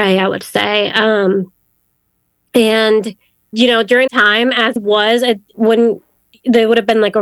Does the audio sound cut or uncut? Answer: cut